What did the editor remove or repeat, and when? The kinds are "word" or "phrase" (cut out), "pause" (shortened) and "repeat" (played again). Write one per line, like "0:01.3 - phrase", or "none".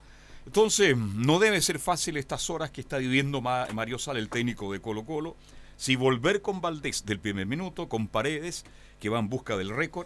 none